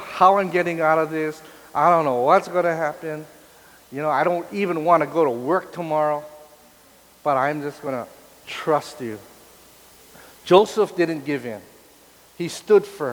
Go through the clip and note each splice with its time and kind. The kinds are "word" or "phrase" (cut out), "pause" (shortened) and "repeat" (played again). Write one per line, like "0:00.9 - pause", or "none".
none